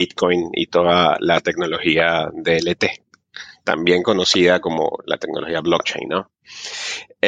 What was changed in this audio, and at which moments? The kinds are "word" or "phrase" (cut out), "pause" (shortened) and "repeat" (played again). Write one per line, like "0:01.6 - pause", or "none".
none